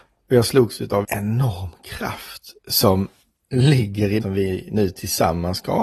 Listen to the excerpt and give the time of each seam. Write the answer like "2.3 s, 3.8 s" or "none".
1.0 s, 2.6 s, 4.2 s